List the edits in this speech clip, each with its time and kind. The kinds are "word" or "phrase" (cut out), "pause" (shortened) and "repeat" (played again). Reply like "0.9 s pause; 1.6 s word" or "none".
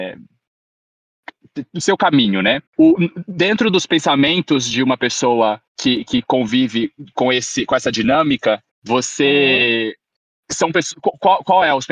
2.7 s pause; 5.7 s pause; 8.7 s pause